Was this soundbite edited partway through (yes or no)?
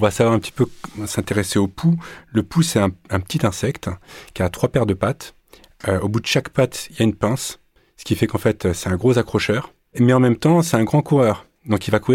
no